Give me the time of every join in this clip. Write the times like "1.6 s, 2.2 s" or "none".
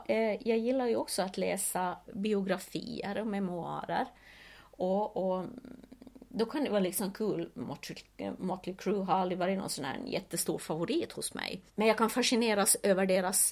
2.0 s, 11.7 s